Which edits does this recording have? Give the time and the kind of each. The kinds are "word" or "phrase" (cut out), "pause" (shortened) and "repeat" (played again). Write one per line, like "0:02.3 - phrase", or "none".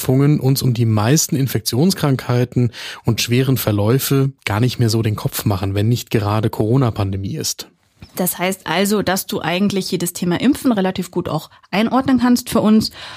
0:03.2 - word